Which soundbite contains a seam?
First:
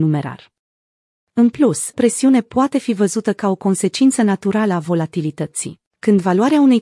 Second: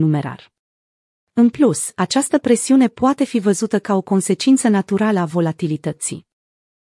first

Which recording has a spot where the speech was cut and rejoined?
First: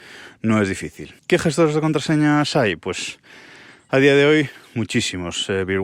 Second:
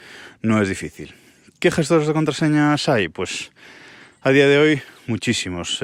first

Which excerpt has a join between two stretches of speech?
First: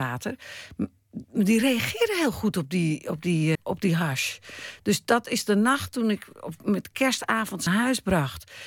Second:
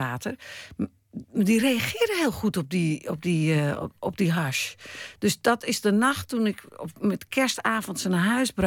first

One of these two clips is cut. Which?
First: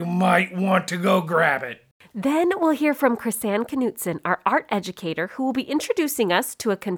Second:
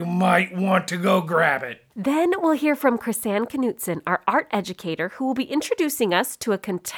second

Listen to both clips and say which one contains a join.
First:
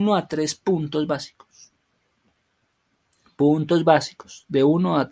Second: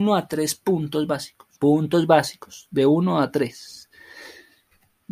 second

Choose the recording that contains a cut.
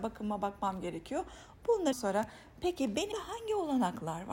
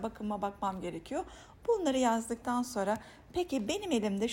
first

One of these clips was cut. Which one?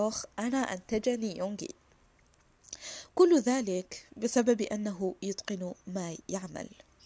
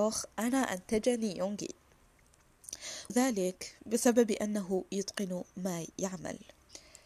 second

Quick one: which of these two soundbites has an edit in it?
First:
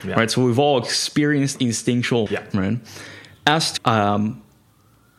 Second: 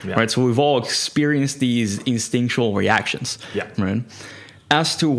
first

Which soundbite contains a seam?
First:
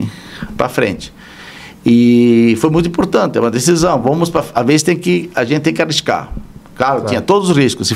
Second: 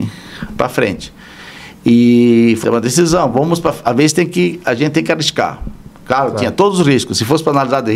second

